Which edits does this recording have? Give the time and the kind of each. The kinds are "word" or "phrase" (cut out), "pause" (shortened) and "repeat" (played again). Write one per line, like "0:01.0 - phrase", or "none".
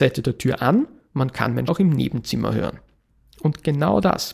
0:01.7 - word